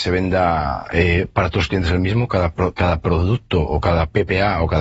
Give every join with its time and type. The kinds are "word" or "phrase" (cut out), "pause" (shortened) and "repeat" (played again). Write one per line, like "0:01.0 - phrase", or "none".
none